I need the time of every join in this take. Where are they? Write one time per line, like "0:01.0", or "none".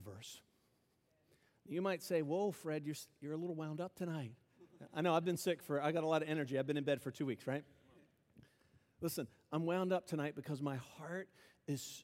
none